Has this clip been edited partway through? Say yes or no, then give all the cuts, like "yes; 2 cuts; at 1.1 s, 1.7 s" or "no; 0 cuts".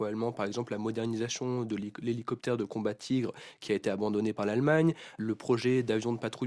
no; 0 cuts